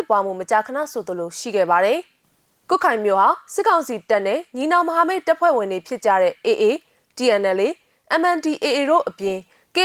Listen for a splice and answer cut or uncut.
uncut